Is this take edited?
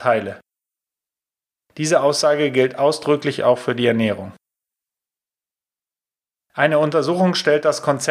no; 0 cuts

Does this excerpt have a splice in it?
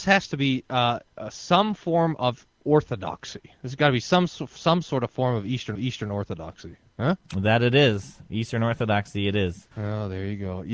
yes; 2 cuts; at 5.7 s, 9.7 s

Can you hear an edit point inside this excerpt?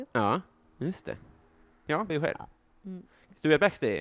yes; 1 cut; at 2.1 s

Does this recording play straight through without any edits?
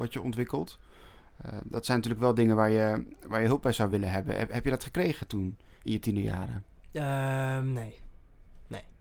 yes; 0 cuts

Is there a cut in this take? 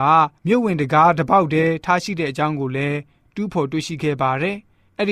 no; 0 cuts

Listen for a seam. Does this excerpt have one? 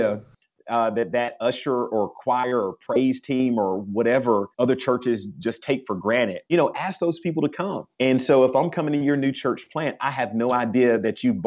yes; 3 cuts; at 4.5 s, 6.5 s, 7.9 s

